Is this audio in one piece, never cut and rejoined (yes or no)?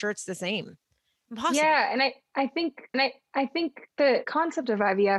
no